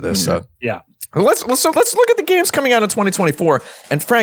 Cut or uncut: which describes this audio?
cut